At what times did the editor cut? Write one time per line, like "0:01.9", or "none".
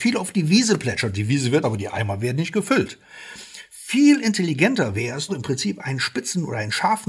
0:01.6
0:05.3